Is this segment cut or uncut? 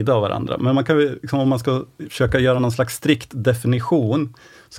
uncut